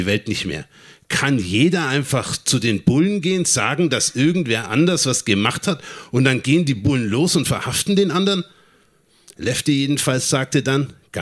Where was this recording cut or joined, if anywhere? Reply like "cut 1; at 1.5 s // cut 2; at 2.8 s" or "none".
none